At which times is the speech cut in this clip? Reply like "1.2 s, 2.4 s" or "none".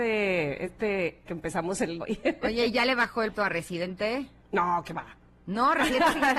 1.3 s, 2.0 s, 3.3 s, 4.4 s